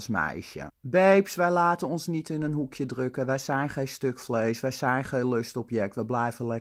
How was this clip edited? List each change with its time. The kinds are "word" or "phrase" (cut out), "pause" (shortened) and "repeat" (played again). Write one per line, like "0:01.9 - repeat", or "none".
none